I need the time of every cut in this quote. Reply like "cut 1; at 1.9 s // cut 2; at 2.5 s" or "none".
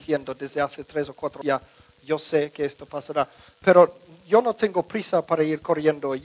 cut 1; at 1.4 s